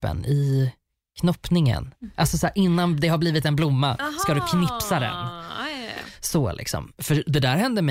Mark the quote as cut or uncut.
uncut